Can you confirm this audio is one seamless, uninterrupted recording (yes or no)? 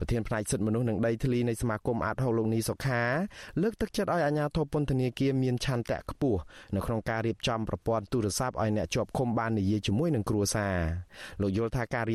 yes